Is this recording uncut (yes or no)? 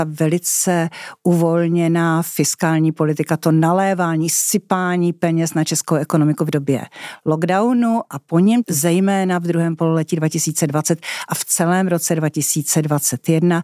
yes